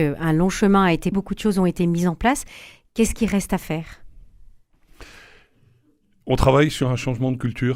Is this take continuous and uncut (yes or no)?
no